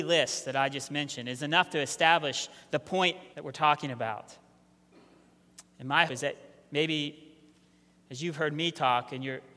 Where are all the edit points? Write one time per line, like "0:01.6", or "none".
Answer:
0:03.3
0:06.1